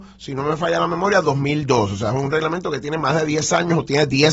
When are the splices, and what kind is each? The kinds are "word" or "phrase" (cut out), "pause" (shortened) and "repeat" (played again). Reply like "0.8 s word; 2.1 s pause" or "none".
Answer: none